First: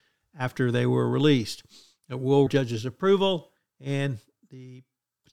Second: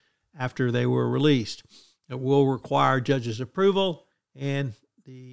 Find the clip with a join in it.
first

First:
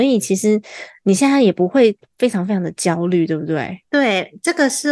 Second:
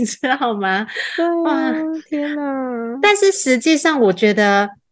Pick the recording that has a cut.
first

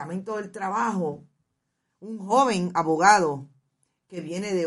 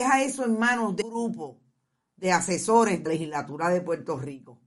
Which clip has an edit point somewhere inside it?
second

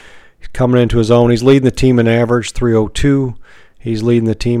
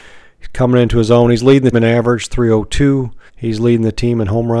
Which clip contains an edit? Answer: second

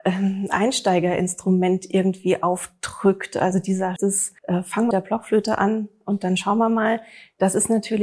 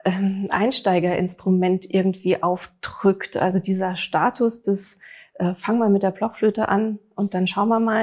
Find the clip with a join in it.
first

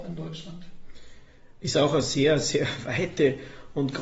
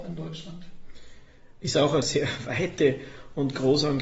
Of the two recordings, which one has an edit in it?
second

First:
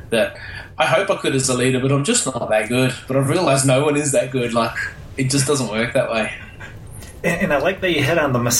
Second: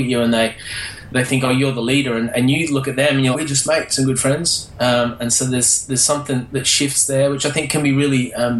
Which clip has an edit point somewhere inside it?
second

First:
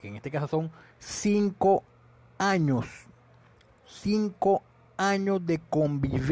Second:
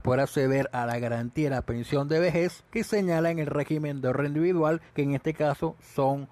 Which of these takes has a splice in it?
second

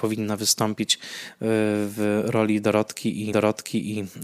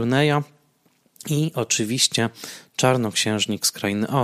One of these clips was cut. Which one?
first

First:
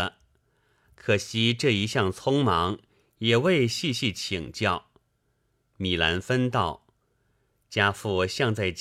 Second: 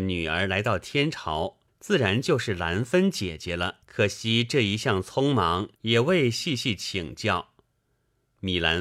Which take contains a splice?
second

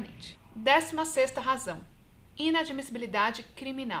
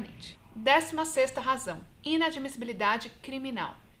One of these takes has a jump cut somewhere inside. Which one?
second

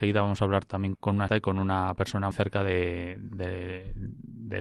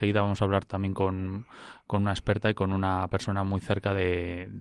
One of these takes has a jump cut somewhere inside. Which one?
first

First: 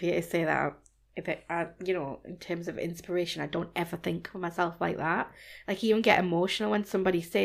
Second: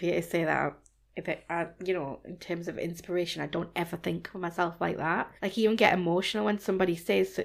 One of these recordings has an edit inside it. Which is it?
second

